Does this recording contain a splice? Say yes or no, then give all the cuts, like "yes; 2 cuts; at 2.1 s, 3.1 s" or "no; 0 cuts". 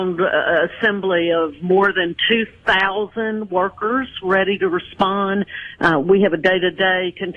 no; 0 cuts